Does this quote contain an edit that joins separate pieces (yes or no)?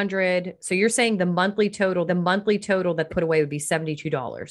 yes